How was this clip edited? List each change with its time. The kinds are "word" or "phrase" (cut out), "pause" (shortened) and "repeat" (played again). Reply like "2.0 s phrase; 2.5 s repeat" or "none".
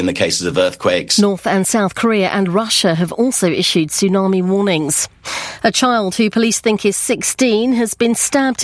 none